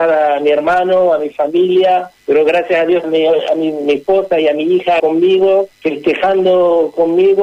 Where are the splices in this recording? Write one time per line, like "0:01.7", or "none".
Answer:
0:02.2
0:03.0
0:05.0
0:05.7